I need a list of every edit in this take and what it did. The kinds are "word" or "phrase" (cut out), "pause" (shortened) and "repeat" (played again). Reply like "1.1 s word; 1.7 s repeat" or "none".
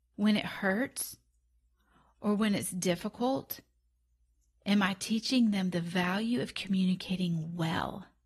none